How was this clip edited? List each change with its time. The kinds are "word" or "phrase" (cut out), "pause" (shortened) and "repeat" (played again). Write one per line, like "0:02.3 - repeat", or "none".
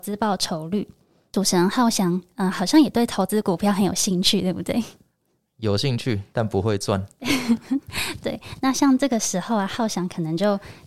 none